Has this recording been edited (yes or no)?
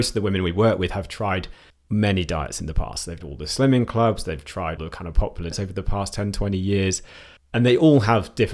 yes